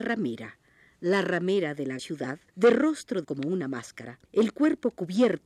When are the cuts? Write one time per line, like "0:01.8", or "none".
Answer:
0:02.0
0:02.5
0:03.2
0:04.2